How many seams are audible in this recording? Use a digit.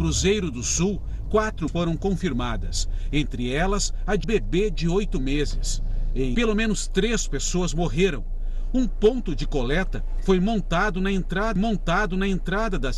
4